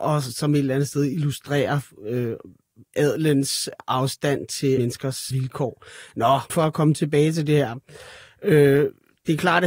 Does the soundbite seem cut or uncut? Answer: cut